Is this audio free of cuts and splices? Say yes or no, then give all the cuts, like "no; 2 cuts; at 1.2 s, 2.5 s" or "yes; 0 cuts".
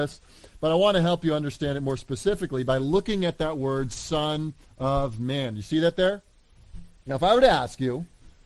yes; 0 cuts